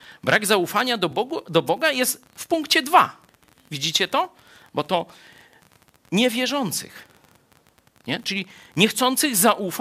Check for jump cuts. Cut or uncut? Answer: uncut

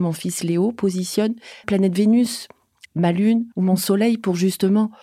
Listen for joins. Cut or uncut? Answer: cut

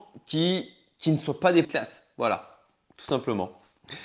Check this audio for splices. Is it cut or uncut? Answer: cut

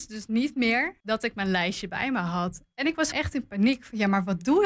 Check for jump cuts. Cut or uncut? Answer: cut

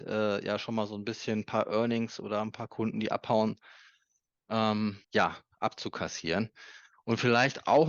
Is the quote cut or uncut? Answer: cut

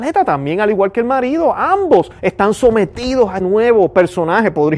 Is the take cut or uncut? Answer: cut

